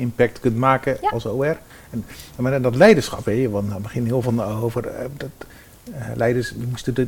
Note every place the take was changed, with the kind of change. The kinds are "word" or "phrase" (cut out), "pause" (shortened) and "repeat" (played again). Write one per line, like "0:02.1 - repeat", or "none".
0:01.7 - pause
0:04.2 - word